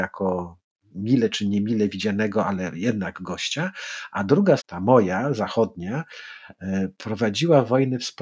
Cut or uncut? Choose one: cut